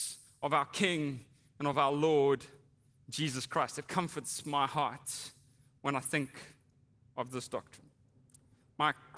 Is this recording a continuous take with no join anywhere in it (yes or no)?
yes